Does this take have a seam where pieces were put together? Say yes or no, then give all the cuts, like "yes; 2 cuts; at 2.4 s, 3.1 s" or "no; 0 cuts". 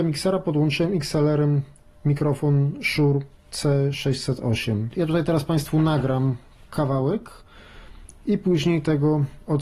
no; 0 cuts